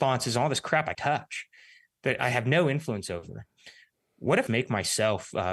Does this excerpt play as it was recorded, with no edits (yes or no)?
no